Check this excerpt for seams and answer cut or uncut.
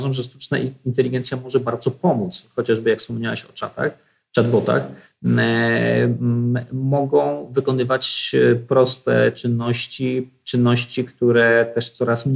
uncut